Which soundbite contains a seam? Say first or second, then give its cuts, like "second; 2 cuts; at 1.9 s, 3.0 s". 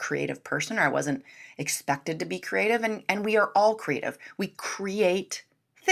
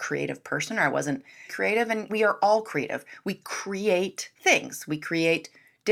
second; 3 cuts; at 1.5 s, 2.1 s, 4.4 s